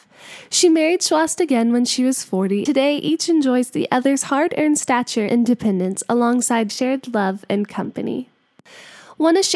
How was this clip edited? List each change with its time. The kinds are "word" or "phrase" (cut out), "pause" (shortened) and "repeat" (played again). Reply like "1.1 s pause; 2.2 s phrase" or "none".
2.7 s word; 5.3 s word; 6.7 s word